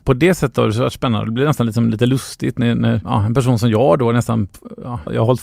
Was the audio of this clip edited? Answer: no; 0 cuts

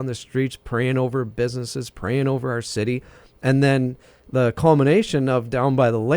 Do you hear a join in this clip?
no; 0 cuts

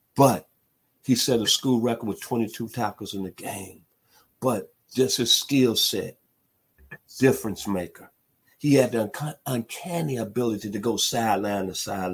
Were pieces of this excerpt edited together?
no; 0 cuts

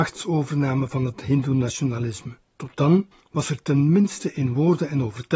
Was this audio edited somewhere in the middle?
yes; 2 cuts; at 2.5 s, 3.1 s

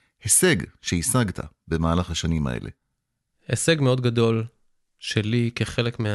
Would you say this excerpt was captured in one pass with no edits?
yes; 0 cuts

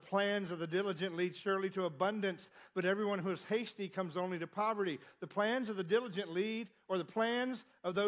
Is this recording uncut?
yes; 0 cuts

